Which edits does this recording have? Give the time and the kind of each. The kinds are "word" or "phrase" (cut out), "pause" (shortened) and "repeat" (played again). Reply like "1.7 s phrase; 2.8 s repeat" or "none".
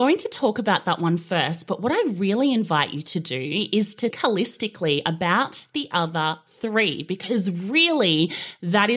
4.1 s word